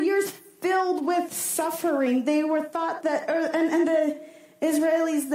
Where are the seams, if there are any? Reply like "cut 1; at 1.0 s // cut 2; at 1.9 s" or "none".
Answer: none